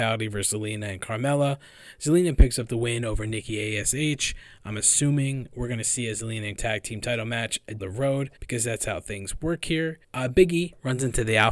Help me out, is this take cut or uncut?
cut